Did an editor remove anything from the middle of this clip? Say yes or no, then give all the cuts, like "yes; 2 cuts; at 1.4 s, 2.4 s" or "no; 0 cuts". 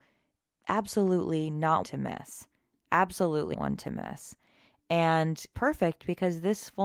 yes; 3 cuts; at 1.8 s, 3.5 s, 5.5 s